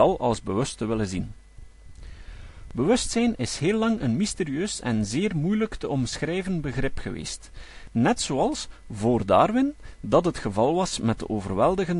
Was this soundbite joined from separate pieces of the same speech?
no; 0 cuts

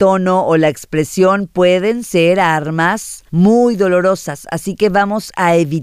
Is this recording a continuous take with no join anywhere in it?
no; 1 cut; at 3.3 s

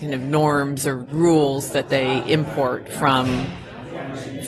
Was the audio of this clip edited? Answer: yes; 1 cut; at 1.1 s

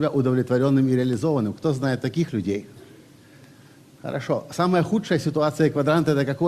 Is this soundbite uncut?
yes; 0 cuts

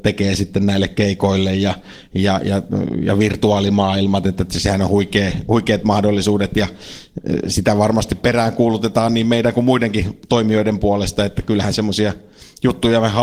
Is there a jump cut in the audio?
no; 0 cuts

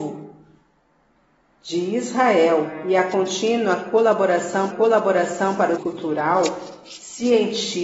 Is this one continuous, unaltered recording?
no; 2 cuts; at 4.7 s, 5.8 s

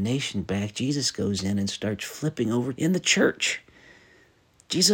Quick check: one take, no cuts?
no; 1 cut; at 2.7 s

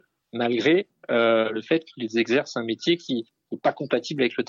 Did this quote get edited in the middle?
no; 0 cuts

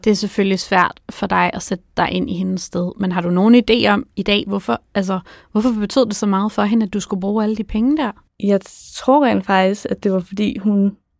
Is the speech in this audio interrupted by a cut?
no; 0 cuts

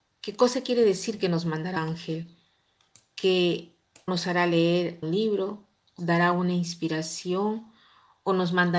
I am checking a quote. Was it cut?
yes; 4 cuts; at 1.8 s, 4.1 s, 5.0 s, 6.0 s

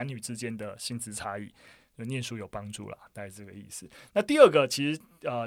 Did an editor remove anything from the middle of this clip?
no; 0 cuts

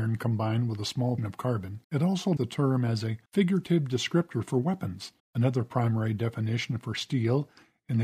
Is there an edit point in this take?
yes; 5 cuts; at 1.2 s, 1.8 s, 2.4 s, 3.3 s, 5.2 s

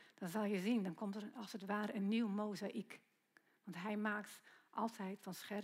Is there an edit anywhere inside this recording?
no; 0 cuts

